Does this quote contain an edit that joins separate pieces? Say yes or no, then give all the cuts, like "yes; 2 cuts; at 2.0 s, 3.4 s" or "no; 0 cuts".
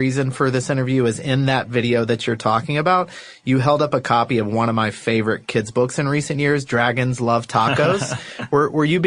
no; 0 cuts